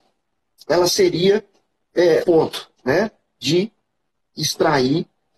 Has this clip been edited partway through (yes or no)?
yes